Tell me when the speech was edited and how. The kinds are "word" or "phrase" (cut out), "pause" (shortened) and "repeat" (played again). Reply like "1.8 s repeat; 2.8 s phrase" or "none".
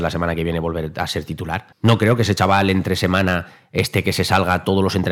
1.7 s pause